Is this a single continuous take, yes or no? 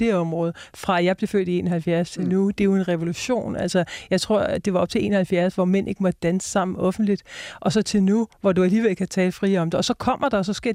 no